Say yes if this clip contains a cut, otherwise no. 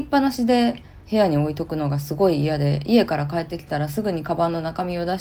yes